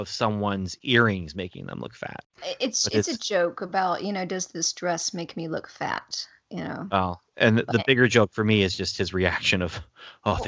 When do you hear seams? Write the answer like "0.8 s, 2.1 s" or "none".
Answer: 7.3 s, 7.7 s